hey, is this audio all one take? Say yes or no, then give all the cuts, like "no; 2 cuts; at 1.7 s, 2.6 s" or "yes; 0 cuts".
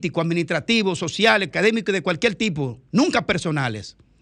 no; 1 cut; at 1.5 s